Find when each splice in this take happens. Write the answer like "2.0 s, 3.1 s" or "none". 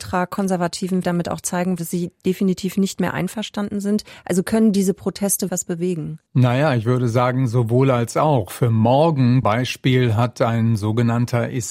1.0 s, 1.8 s, 5.5 s, 6.3 s, 9.4 s